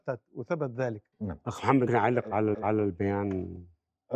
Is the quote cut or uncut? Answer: cut